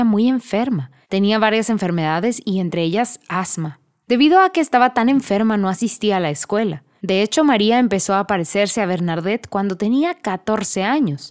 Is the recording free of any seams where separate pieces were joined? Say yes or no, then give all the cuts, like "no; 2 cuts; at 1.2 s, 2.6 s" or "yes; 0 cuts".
yes; 0 cuts